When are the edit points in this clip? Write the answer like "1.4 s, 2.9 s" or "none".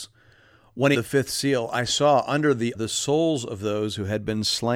0.9 s, 2.7 s